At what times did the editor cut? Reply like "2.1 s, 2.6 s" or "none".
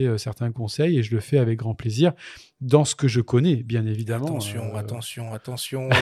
none